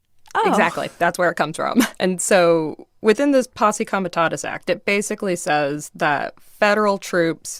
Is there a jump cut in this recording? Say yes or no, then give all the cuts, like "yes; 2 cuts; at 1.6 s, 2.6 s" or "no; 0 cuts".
yes; 1 cut; at 2.0 s